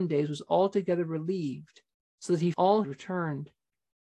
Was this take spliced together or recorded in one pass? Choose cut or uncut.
cut